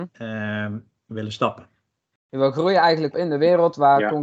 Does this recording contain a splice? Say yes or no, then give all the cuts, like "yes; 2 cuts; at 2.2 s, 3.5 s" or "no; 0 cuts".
yes; 1 cut; at 3.1 s